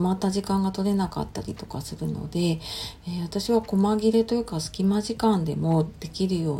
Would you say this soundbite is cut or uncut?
uncut